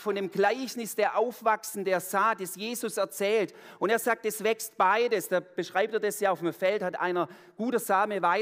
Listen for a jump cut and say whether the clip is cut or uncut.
uncut